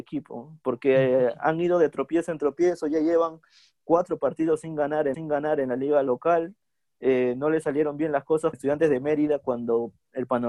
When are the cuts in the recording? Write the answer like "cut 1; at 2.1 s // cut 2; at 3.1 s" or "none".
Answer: cut 1; at 5.1 s // cut 2; at 8.5 s